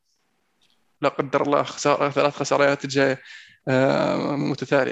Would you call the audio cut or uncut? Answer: uncut